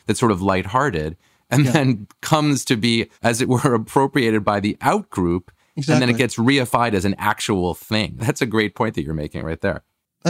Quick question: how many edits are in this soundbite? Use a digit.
1